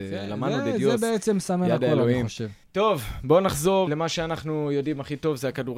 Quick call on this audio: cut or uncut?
cut